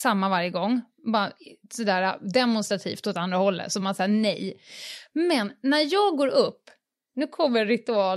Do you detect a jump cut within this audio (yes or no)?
no